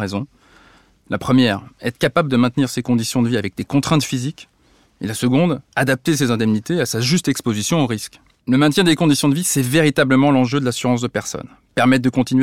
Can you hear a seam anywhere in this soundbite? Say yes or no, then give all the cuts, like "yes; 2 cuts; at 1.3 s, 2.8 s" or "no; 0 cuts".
yes; 1 cut; at 8.3 s